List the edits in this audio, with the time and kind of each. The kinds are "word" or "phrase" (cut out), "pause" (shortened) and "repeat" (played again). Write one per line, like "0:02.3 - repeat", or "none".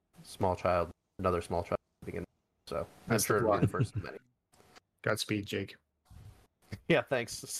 none